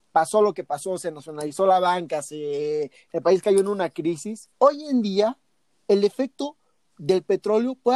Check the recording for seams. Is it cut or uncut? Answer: cut